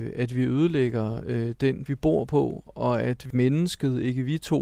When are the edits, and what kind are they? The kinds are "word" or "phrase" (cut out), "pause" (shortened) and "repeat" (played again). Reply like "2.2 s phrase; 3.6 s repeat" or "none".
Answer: 1.9 s word